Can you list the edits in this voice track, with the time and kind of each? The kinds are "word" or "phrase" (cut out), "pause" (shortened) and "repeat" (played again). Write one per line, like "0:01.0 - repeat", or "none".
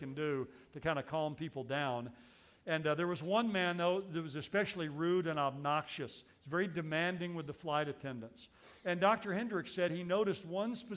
none